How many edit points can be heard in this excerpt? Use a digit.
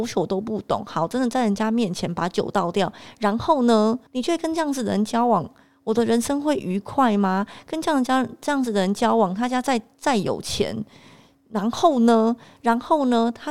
1